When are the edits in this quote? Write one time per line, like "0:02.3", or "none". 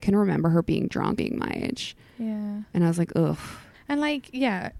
0:01.2
0:03.7